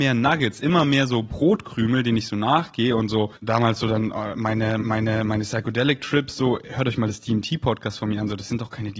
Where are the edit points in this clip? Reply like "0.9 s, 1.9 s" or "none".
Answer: 3.3 s, 4.8 s